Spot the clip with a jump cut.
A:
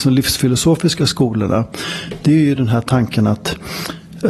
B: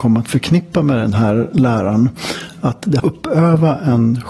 B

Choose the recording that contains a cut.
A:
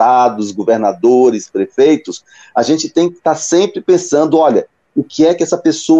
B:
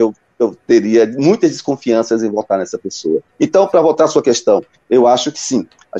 B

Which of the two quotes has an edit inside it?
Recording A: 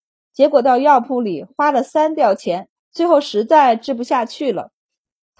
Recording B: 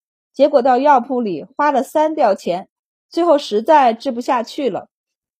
A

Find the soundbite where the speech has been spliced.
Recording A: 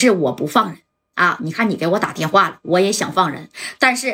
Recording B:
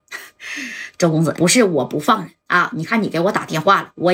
B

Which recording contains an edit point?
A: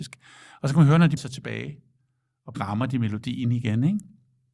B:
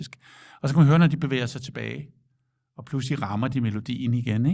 A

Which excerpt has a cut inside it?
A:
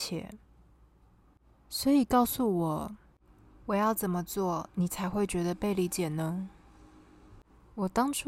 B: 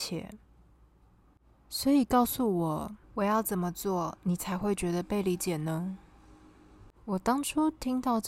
B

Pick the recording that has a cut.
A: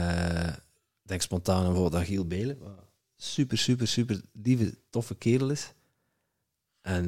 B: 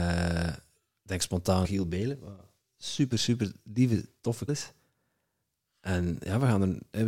B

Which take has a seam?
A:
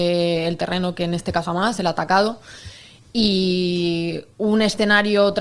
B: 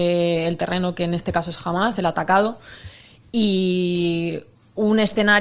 A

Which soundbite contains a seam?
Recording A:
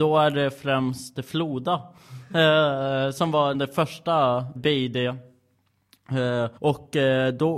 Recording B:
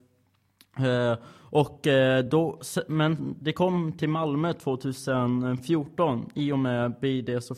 A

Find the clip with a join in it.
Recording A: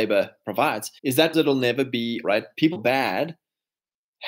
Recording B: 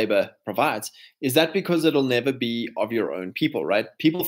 A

